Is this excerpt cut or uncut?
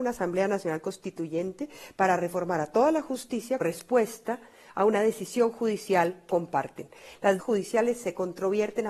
cut